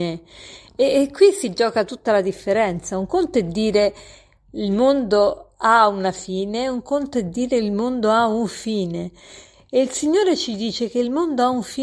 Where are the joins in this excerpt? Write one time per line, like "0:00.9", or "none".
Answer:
none